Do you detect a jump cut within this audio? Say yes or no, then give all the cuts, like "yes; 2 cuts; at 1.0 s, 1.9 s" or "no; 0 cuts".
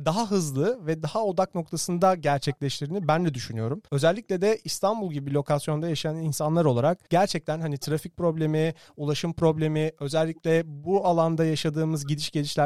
yes; 2 cuts; at 3.9 s, 7.1 s